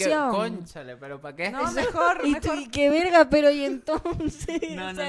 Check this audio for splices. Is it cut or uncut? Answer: uncut